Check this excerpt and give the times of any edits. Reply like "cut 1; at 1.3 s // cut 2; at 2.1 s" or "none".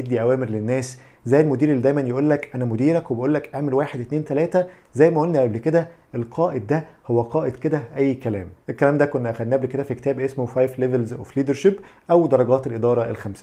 none